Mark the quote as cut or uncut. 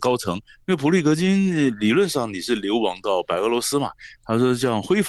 uncut